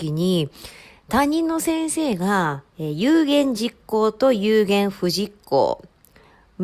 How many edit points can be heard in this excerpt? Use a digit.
1